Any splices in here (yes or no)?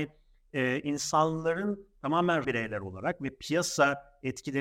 yes